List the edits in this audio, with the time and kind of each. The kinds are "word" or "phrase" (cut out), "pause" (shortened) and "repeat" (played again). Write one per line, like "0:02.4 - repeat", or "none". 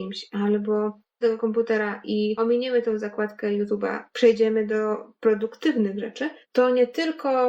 0:01.2 - word
0:04.1 - word
0:06.4 - pause